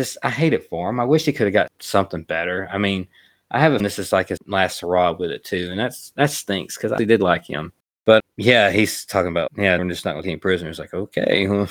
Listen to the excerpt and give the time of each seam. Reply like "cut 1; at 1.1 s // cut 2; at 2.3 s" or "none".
cut 1; at 1.7 s // cut 2; at 3.8 s // cut 3; at 4.4 s // cut 4; at 7.0 s // cut 5; at 8.2 s // cut 6; at 9.5 s // cut 7; at 9.8 s // cut 8; at 10.2 s